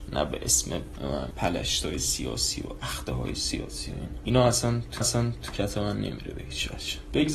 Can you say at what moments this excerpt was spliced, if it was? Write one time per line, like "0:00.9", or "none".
0:01.3
0:05.0